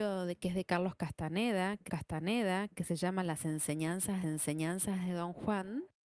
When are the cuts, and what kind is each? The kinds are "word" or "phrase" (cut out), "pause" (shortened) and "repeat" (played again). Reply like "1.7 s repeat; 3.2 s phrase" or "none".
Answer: 1.9 s repeat; 4.2 s repeat